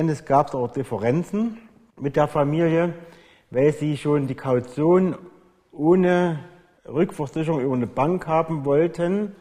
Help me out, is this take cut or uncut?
uncut